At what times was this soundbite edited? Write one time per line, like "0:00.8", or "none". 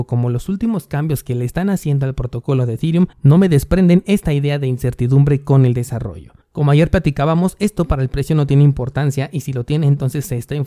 0:03.1
0:06.4